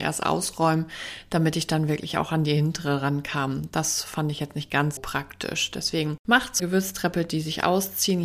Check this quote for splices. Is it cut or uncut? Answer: cut